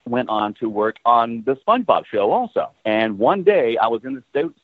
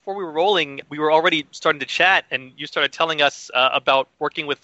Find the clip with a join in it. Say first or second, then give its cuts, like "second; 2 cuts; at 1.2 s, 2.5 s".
first; 1 cut; at 2.8 s